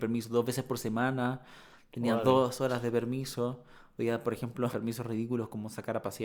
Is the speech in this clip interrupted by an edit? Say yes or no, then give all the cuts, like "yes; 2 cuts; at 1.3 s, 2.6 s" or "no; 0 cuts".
yes; 1 cut; at 4.7 s